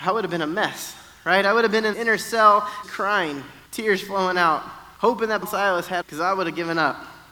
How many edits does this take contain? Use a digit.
6